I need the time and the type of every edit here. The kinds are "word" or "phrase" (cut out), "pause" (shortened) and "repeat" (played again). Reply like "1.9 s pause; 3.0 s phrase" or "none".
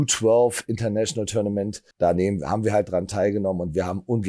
1.9 s pause